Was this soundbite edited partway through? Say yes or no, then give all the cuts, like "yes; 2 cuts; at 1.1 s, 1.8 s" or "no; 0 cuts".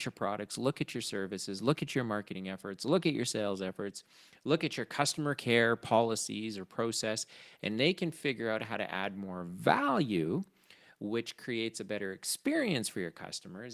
no; 0 cuts